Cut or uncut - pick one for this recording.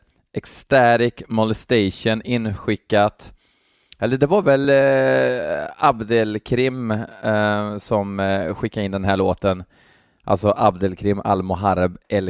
uncut